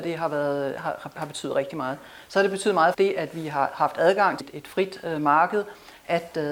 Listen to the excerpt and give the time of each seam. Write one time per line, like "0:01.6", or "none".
0:02.9
0:04.4